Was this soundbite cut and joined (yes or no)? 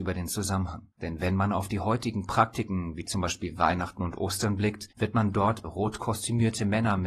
yes